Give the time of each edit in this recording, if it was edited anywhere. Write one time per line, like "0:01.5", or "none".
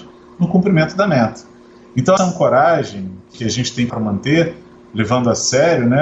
0:02.2
0:03.3
0:03.9